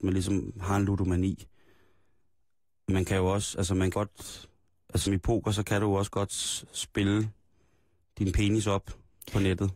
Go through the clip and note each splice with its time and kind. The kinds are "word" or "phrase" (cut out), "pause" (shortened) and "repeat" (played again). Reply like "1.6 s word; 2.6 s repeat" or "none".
3.9 s word; 5.1 s word